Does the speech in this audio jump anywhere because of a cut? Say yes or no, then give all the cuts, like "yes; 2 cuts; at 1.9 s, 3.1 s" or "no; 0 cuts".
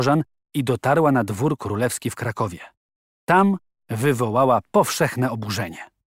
no; 0 cuts